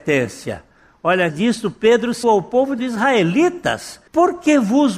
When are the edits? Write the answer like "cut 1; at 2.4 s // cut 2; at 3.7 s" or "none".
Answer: cut 1; at 1.3 s // cut 2; at 2.2 s // cut 3; at 2.8 s // cut 4; at 4.1 s

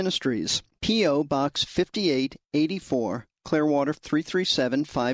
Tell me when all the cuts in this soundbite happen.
cut 1; at 3.9 s

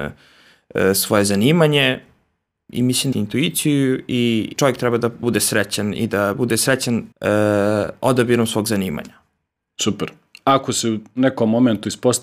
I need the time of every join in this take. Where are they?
cut 1; at 3.1 s // cut 2; at 4.5 s // cut 3; at 5.2 s // cut 4; at 7.1 s

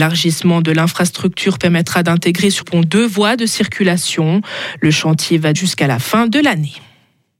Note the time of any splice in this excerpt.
cut 1; at 2.6 s // cut 2; at 5.5 s

